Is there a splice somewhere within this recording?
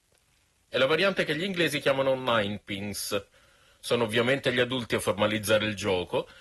no; 0 cuts

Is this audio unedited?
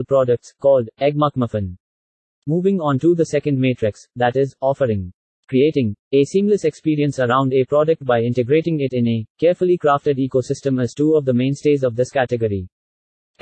yes; 0 cuts

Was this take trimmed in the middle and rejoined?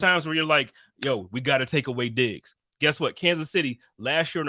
no; 0 cuts

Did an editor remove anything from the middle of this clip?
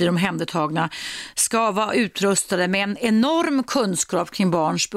no; 0 cuts

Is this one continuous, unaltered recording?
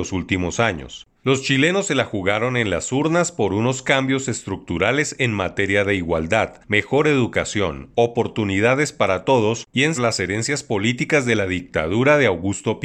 no; 1 cut; at 9.9 s

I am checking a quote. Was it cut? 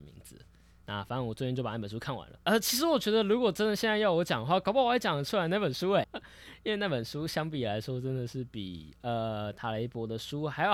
yes; 2 cuts; at 2.4 s, 6.0 s

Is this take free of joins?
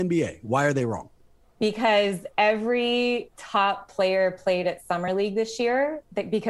yes; 0 cuts

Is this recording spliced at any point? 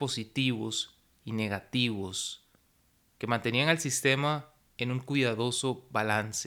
no; 0 cuts

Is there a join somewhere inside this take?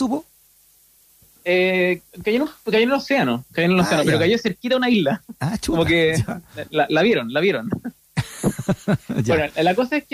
no; 0 cuts

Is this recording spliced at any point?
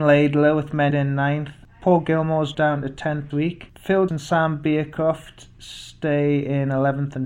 yes; 4 cuts; at 0.9 s, 2.5 s, 3.3 s, 4.1 s

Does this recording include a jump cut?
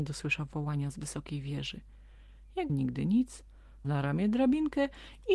yes; 2 cuts; at 2.7 s, 3.8 s

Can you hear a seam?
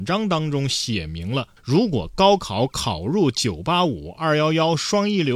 yes; 1 cut; at 1.6 s

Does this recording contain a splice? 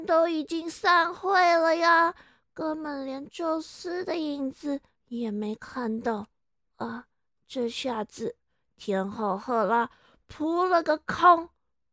no; 0 cuts

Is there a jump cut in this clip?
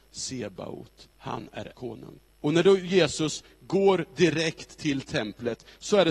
yes; 3 cuts; at 1.1 s, 1.7 s, 2.3 s

